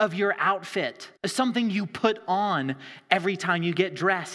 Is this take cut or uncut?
cut